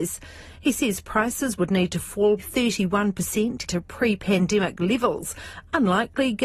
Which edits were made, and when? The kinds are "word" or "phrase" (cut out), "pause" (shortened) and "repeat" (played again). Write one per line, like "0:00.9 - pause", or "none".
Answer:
0:02.4 - word
0:03.7 - word

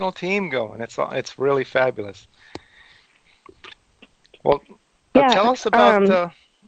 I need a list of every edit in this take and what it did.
none

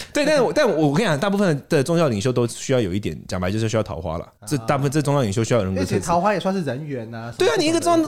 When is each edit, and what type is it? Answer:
0:04.4 - pause

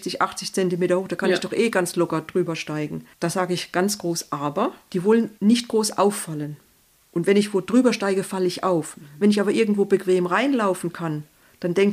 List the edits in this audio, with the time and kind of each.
0:05.4 - pause

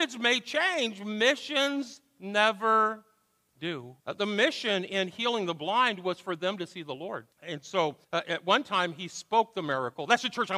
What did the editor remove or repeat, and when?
0:04.0 - pause
0:07.3 - pause
0:08.0 - pause

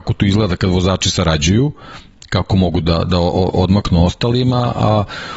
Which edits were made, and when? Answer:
none

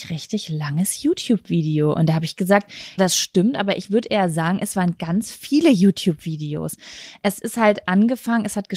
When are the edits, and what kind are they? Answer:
0:03.0 - word

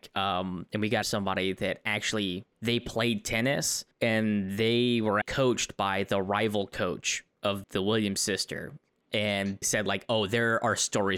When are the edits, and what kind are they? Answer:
0:01.0 - phrase
0:02.5 - pause
0:03.9 - pause
0:05.2 - word
0:07.6 - word
0:09.6 - word

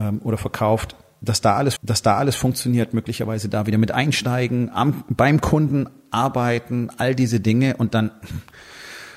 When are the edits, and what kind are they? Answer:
0:01.8 - repeat

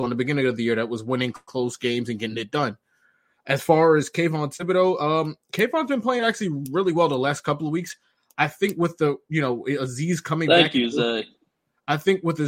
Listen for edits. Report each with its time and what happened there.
none

